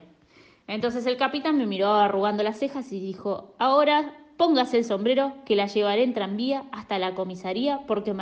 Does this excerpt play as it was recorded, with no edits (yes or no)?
yes